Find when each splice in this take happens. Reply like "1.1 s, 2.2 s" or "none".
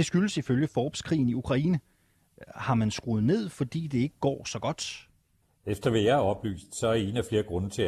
5.4 s

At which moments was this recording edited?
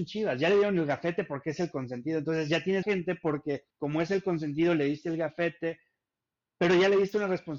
2.8 s, 3.7 s

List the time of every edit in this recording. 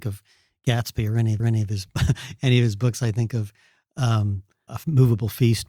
1.4 s, 4.7 s

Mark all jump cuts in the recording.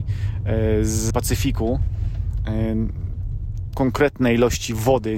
1.1 s, 3.7 s

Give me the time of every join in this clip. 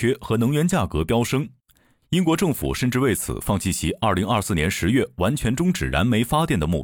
none

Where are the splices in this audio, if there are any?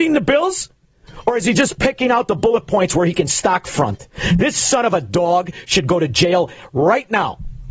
none

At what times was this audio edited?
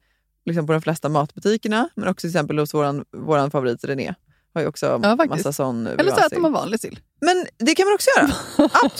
none

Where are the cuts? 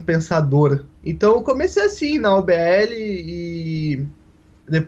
1.0 s

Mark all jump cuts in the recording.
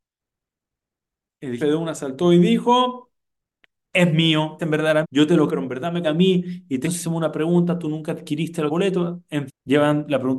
1.6 s, 4.6 s, 5.0 s, 5.5 s, 6.0 s, 6.8 s, 8.7 s, 9.5 s

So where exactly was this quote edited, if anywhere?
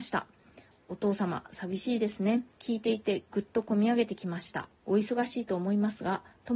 2.5 s, 4.7 s

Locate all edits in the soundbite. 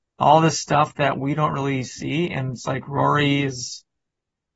none

